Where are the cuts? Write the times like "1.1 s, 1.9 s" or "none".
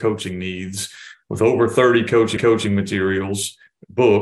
2.4 s

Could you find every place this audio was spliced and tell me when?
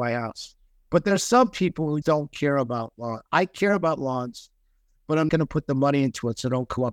2.0 s, 5.3 s

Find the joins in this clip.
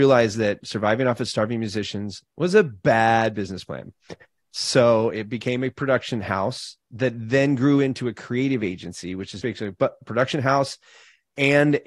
9.4 s

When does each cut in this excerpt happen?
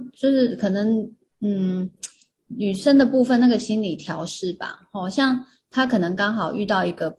none

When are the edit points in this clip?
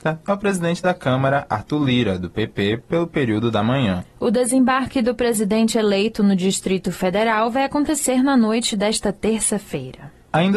none

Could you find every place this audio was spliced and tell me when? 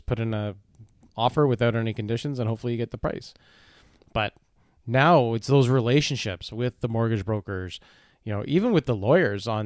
none

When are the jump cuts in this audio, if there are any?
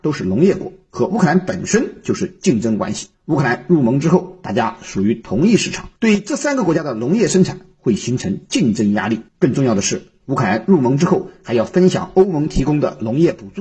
3.1 s, 6.0 s, 9.3 s

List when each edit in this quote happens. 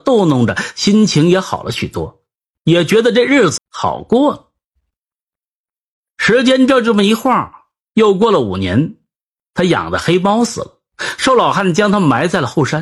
3.6 s

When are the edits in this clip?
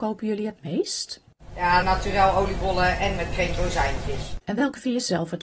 1.8 s, 3.2 s, 3.6 s

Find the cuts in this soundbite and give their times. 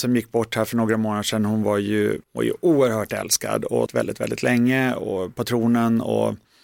2.2 s, 3.9 s

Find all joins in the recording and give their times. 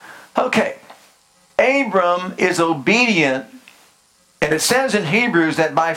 none

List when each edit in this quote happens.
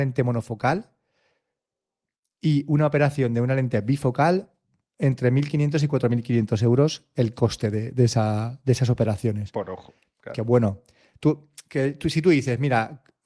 none

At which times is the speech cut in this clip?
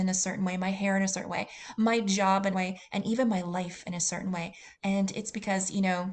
2.5 s, 4.7 s

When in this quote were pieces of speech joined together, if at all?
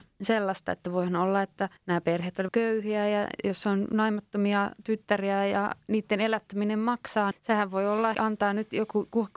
1.8 s, 2.5 s, 7.3 s, 8.1 s

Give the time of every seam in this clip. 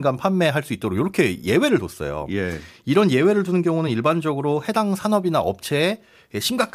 none

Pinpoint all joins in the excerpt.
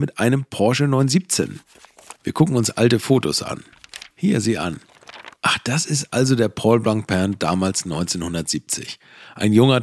2.2 s, 4.1 s, 5.4 s

